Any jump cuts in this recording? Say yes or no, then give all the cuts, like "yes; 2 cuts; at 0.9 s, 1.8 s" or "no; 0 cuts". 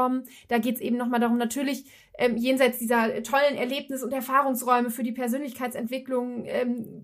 no; 0 cuts